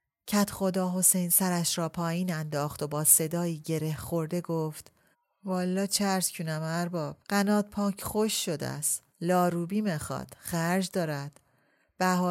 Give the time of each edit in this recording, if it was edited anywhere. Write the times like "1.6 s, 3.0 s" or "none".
5.1 s, 7.2 s, 9.1 s